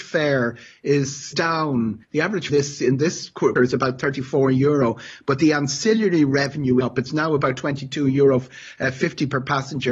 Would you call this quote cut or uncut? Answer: cut